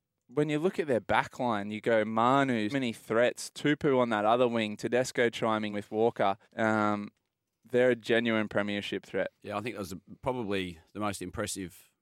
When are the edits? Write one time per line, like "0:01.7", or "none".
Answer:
0:02.7
0:05.7
0:06.4
0:09.4